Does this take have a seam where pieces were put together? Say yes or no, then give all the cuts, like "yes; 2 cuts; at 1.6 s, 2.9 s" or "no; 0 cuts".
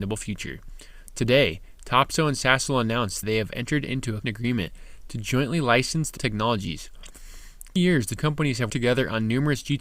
yes; 6 cuts; at 3.2 s, 4.2 s, 6.2 s, 7.8 s, 8.2 s, 8.7 s